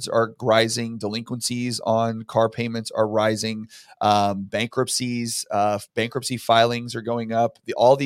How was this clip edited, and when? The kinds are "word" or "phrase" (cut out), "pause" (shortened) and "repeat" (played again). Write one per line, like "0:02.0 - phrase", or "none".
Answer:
none